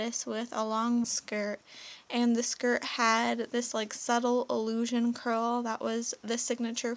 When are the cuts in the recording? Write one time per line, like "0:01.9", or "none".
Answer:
0:01.0